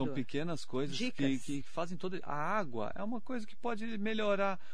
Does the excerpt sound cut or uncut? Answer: uncut